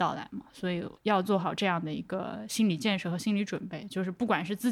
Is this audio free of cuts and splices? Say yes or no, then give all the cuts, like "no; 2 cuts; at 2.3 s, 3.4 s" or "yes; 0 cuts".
no; 1 cut; at 1.0 s